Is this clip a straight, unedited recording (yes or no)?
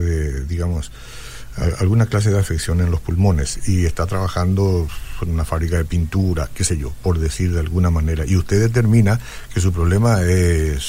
yes